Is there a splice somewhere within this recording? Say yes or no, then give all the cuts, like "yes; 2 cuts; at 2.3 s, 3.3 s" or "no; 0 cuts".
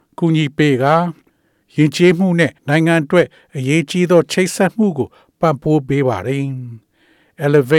yes; 1 cut; at 2.6 s